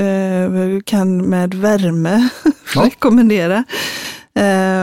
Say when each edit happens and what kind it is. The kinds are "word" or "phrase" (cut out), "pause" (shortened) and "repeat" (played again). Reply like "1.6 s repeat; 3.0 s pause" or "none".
none